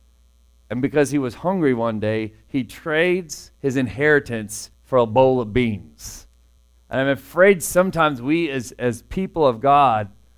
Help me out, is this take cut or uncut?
cut